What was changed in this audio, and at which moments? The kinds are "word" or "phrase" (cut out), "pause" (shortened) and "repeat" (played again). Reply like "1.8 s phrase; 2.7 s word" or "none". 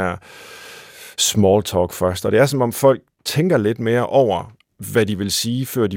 none